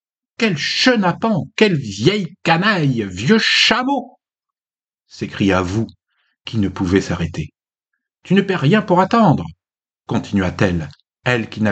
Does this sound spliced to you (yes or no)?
no